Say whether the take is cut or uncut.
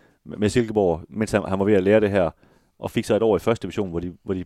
uncut